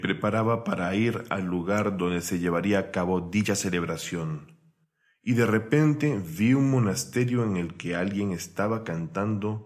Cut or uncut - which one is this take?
uncut